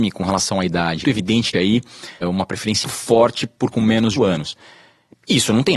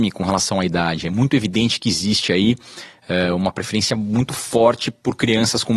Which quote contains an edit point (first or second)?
first